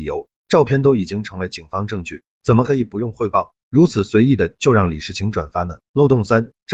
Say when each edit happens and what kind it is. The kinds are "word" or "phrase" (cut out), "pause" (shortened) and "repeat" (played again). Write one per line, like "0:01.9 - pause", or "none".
0:05.8 - pause